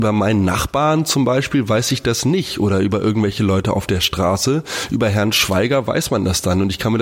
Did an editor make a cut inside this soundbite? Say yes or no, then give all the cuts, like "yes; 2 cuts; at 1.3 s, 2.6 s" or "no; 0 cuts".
no; 0 cuts